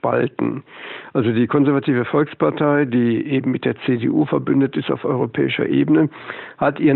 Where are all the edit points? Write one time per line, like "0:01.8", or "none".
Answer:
none